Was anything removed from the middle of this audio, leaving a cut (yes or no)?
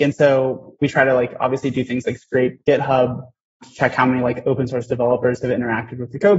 no